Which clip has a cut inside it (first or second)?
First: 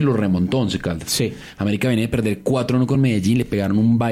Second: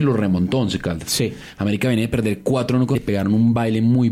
second